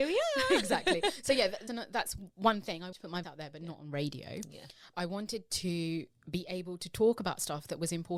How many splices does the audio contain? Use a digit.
4